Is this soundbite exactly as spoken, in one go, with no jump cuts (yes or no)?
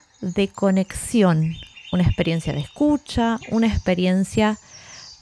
yes